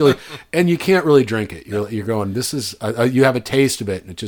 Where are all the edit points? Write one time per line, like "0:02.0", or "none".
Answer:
none

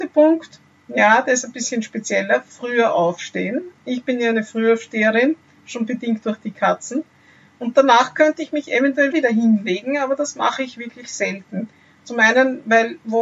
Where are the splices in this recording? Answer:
0:09.1

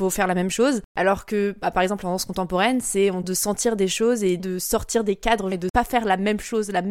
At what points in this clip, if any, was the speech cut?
0:03.2
0:04.4
0:05.5

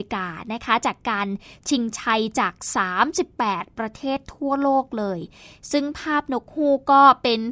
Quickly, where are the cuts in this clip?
none

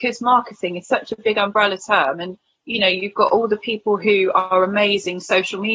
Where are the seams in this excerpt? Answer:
none

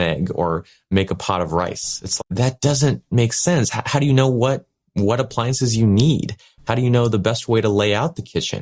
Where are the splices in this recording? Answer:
0:02.2

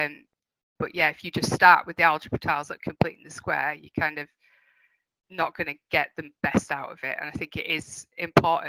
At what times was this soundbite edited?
none

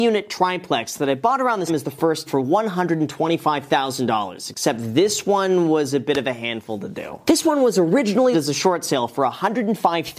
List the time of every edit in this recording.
0:01.7
0:02.3
0:08.3

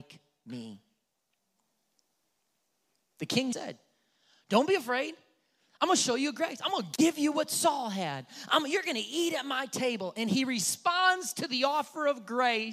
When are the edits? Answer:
0:03.5

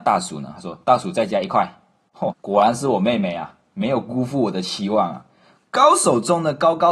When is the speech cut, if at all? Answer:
0:02.3

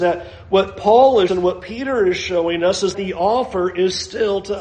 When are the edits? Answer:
0:01.3
0:02.9

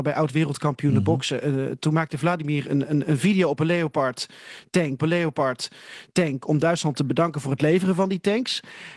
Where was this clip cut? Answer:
0:05.0

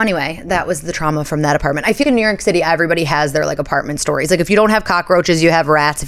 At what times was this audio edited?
0:02.0

